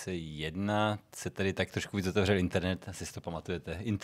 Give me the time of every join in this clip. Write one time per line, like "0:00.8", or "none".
none